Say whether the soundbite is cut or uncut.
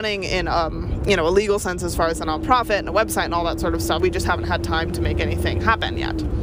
cut